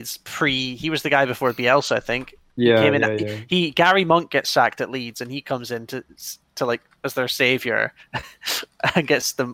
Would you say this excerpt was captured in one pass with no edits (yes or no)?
yes